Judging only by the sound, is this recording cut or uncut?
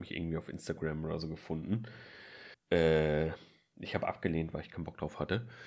cut